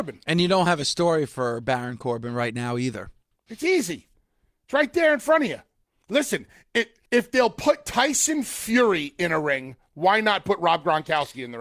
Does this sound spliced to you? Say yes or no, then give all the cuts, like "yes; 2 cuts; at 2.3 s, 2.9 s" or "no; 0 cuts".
yes; 3 cuts; at 3.3 s, 5.7 s, 7.1 s